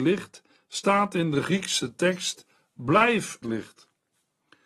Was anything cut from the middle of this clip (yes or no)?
yes